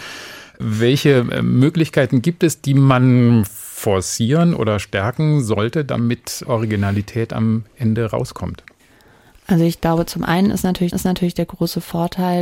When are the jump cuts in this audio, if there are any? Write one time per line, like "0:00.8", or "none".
0:06.4
0:10.9